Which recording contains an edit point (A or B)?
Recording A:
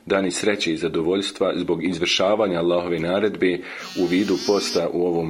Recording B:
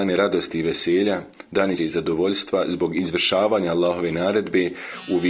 B